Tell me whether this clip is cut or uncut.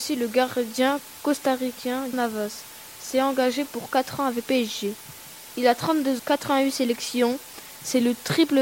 cut